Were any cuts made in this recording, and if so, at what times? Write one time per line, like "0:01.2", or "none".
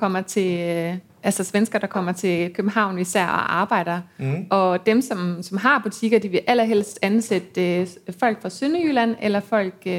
none